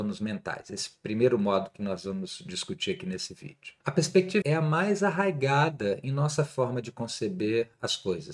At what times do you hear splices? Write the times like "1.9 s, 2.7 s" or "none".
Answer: 3.8 s, 4.4 s